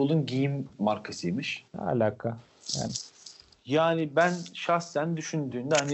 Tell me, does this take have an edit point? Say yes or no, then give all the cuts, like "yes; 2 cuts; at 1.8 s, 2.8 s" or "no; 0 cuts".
yes; 1 cut; at 1.7 s